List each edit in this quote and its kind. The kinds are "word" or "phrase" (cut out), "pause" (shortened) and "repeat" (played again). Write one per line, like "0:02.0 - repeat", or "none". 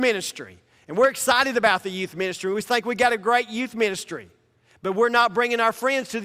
none